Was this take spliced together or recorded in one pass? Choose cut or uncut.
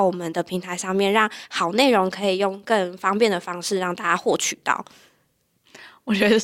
uncut